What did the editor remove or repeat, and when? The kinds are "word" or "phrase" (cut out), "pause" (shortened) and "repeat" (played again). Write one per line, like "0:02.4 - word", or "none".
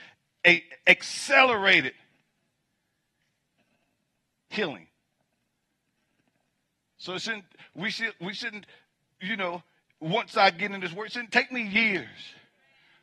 none